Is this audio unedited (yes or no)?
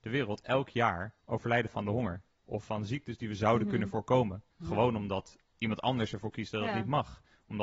no